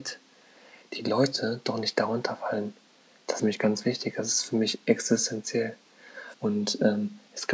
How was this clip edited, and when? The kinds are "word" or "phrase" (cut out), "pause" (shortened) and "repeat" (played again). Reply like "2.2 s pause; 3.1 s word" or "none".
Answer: 3.4 s word; 6.3 s pause